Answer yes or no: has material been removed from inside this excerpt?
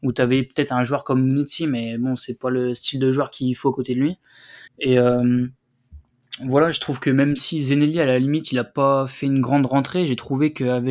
yes